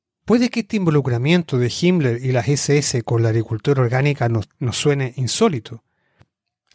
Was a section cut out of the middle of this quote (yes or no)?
no